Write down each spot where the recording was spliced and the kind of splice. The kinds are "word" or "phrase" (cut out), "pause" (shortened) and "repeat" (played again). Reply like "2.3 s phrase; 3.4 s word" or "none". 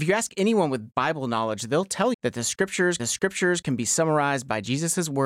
0.9 s word; 2.1 s word; 3.0 s repeat